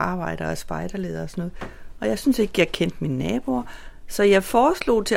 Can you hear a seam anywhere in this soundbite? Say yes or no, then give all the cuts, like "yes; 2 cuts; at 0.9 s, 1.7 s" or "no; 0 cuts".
no; 0 cuts